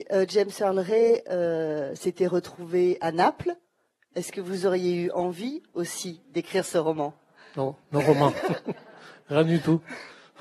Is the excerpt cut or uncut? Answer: uncut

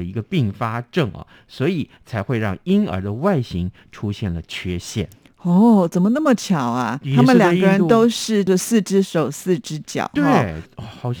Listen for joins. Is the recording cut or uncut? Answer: uncut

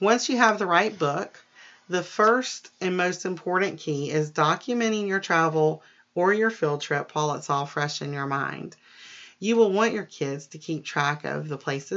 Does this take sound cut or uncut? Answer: cut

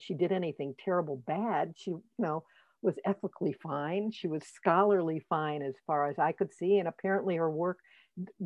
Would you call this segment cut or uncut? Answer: uncut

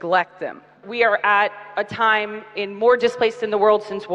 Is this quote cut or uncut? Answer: uncut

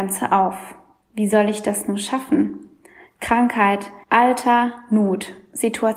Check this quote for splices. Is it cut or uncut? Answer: cut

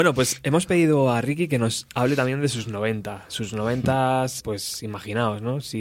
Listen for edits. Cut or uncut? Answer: cut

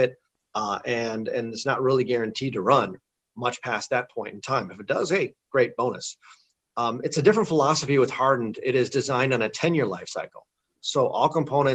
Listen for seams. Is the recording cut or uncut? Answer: uncut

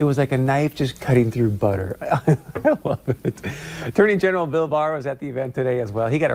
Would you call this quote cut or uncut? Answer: uncut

